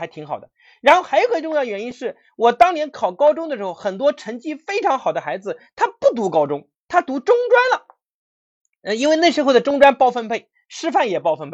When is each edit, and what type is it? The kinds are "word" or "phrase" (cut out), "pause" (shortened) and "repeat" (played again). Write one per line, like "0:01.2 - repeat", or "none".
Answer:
none